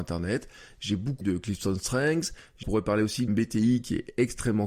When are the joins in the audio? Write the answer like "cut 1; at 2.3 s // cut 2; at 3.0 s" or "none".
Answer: cut 1; at 1.2 s // cut 2; at 2.6 s // cut 3; at 3.3 s